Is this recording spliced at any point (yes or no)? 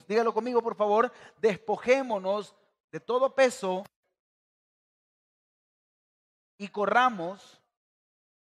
no